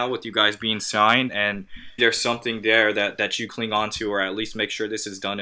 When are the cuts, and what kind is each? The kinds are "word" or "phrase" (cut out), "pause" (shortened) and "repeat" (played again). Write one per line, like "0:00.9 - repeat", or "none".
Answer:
0:01.3 - word
0:02.0 - word
0:03.5 - word